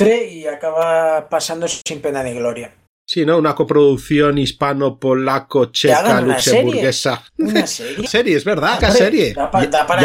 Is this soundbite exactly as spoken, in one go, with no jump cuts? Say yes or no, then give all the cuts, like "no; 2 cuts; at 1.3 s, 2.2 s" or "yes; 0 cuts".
no; 4 cuts; at 2.9 s, 7.3 s, 8.1 s, 8.8 s